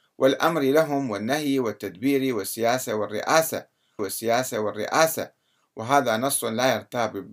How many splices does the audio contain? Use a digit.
1